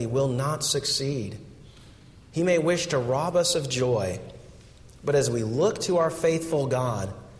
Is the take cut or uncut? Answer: uncut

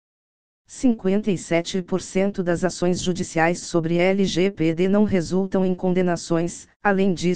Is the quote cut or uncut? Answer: uncut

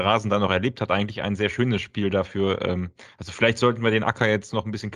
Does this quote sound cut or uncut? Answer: uncut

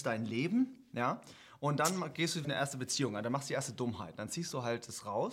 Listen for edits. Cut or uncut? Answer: cut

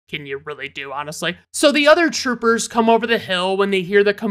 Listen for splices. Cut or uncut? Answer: uncut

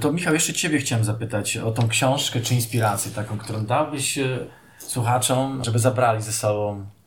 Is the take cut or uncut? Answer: uncut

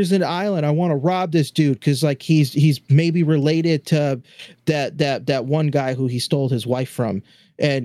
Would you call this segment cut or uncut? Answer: uncut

